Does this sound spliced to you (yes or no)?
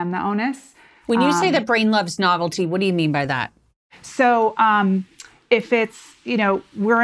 no